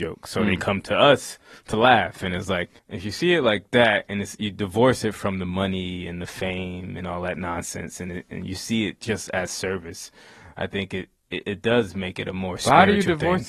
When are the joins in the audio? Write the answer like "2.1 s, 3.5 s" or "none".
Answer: 2.8 s